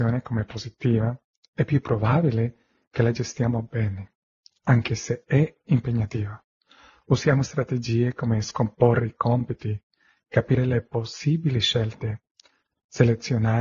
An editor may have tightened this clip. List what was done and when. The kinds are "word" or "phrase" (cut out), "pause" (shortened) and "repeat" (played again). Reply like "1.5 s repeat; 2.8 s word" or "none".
none